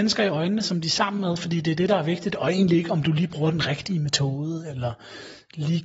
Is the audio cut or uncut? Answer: uncut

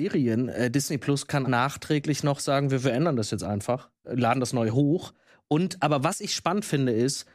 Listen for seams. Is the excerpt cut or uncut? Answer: cut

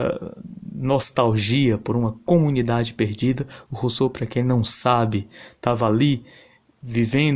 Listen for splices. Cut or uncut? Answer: uncut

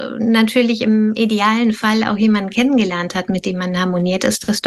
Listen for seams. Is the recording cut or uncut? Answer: uncut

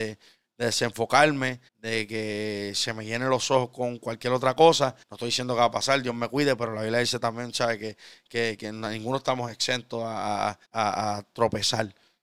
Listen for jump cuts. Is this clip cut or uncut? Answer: cut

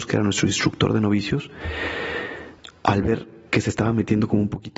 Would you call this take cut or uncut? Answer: uncut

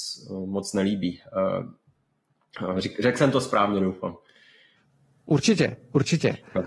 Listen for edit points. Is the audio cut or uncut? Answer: uncut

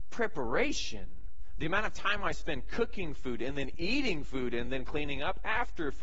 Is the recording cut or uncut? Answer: uncut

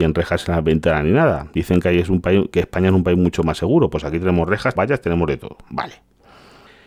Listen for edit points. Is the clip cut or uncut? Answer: cut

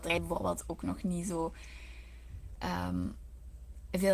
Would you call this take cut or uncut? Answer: uncut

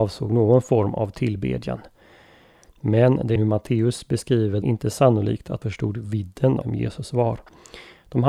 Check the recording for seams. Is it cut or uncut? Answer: cut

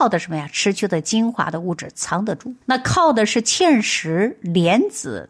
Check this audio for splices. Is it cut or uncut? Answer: cut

